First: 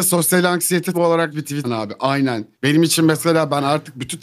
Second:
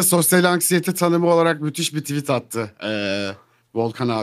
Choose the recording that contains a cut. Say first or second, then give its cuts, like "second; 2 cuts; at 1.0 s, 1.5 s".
first; 4 cuts; at 0.9 s, 1.3 s, 1.6 s, 2.5 s